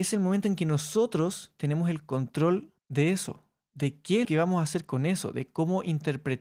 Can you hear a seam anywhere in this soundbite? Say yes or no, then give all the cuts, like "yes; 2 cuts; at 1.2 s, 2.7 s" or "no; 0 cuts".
yes; 2 cuts; at 2.8 s, 4.2 s